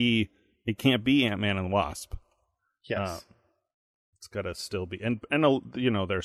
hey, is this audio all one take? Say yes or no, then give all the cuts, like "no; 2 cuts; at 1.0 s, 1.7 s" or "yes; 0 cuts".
yes; 0 cuts